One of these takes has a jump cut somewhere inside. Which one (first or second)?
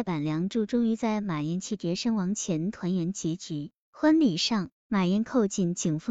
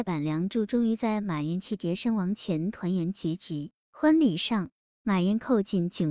first